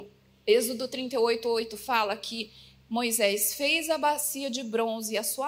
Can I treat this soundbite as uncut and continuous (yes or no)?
yes